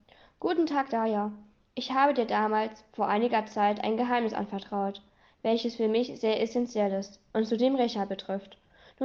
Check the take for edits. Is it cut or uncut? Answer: uncut